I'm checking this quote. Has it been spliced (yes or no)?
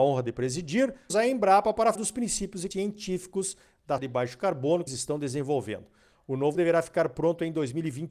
yes